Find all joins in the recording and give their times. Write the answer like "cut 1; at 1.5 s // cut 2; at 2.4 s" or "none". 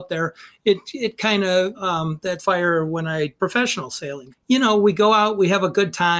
cut 1; at 1.7 s // cut 2; at 2.4 s // cut 3; at 3.4 s // cut 4; at 4.3 s